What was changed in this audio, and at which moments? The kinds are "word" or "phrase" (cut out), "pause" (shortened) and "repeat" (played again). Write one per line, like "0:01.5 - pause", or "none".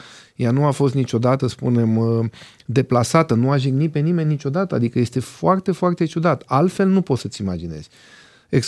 0:01.4 - word